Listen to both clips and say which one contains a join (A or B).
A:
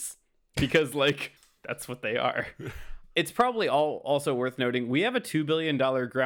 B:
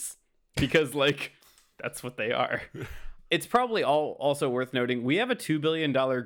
A